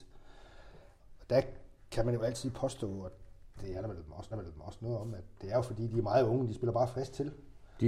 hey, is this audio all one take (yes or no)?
no